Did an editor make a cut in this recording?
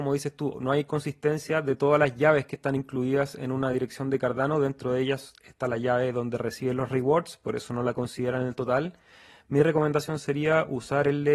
no; 0 cuts

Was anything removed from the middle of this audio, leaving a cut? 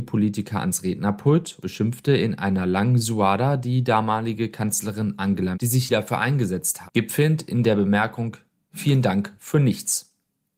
yes; 4 cuts; at 1.6 s, 5.5 s, 5.9 s, 6.9 s

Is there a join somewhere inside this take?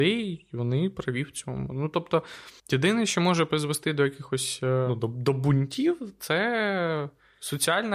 yes; 1 cut; at 2.6 s

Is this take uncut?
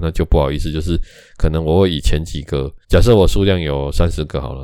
no; 1 cut; at 2.8 s

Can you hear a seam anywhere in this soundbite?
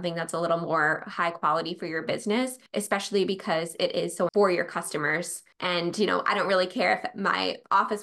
yes; 3 cuts; at 2.7 s, 4.3 s, 5.5 s

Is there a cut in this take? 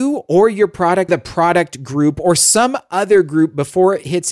yes; 1 cut; at 1.1 s

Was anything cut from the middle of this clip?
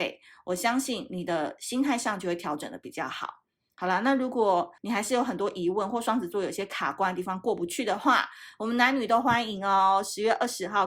yes; 1 cut; at 4.8 s

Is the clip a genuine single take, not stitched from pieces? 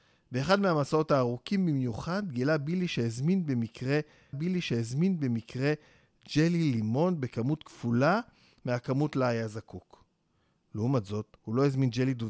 no; 1 cut; at 4.3 s

